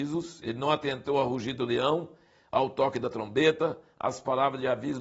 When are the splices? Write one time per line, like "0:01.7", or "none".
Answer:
none